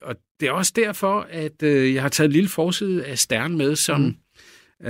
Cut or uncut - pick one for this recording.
uncut